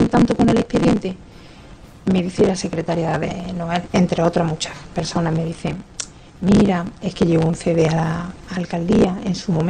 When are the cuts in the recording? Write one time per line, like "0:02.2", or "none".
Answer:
none